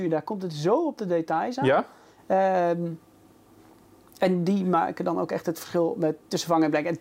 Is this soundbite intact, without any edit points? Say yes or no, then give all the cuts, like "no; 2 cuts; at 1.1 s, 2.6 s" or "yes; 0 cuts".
yes; 0 cuts